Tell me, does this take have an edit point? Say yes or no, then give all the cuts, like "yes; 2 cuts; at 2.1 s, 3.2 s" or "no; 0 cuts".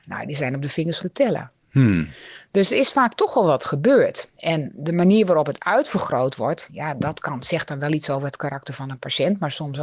yes; 2 cuts; at 1.0 s, 4.3 s